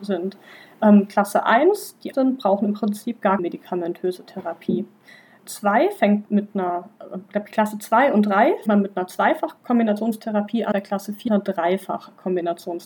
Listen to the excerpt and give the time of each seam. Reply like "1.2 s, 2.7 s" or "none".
2.1 s, 3.4 s, 5.4 s, 6.3 s, 8.7 s, 10.7 s, 11.3 s

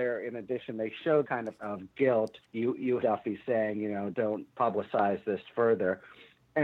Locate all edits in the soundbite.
1.2 s, 1.6 s, 2.4 s, 3.0 s, 4.1 s, 4.5 s

